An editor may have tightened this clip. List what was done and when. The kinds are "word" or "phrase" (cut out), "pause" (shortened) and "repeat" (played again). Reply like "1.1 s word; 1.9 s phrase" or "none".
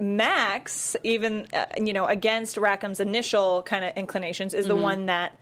none